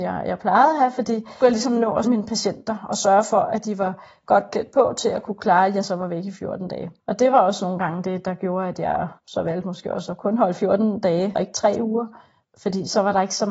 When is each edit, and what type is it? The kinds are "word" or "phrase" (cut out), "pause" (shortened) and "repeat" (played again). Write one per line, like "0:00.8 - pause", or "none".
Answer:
0:01.4 - phrase
0:02.0 - phrase
0:07.0 - pause
0:09.2 - pause
0:11.3 - word